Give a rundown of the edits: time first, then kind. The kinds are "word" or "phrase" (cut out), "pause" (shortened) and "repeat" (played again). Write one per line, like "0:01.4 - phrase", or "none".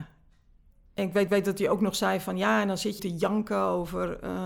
0:01.3 - repeat
0:03.0 - phrase